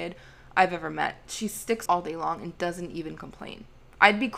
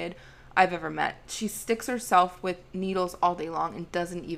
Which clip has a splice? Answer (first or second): first